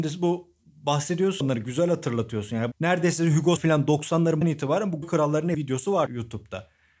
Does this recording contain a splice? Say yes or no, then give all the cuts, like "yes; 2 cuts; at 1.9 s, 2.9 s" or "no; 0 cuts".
yes; 7 cuts; at 1.4 s, 2.7 s, 3.6 s, 4.4 s, 5.0 s, 5.5 s, 6.1 s